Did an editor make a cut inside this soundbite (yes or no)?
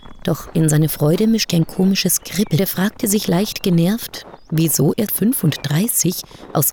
yes